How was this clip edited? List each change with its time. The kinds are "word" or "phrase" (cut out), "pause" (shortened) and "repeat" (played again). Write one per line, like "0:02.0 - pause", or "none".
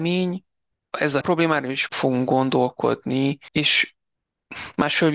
0:01.2 - phrase
0:01.9 - word